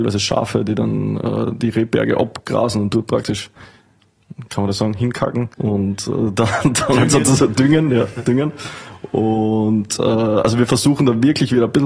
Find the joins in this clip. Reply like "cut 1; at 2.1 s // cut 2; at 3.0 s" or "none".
cut 1; at 5.5 s